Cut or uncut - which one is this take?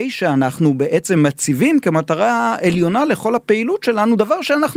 uncut